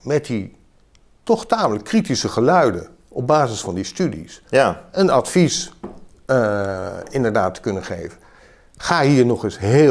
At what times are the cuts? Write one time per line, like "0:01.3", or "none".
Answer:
none